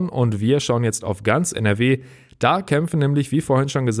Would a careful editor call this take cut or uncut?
uncut